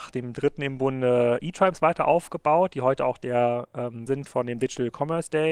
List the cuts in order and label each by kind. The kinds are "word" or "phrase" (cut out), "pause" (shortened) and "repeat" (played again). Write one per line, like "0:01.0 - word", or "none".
0:04.1 - word